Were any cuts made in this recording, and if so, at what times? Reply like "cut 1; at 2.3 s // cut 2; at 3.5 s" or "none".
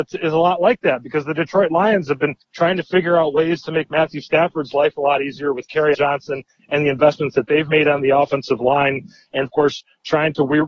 cut 1; at 2.4 s // cut 2; at 5.9 s // cut 3; at 9.4 s